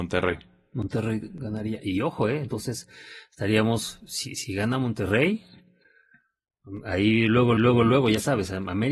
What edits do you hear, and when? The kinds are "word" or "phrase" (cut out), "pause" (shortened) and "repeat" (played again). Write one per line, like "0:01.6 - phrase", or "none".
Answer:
0:07.6 - repeat